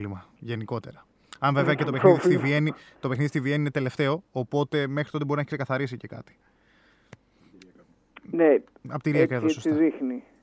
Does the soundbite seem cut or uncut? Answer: uncut